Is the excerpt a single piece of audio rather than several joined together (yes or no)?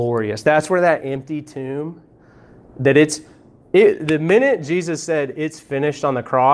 yes